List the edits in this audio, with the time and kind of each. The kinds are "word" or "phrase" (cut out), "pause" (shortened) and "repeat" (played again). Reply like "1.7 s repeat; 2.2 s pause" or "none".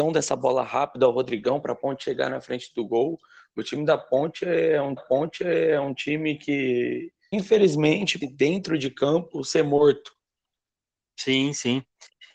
5.0 s repeat; 7.3 s word; 8.2 s word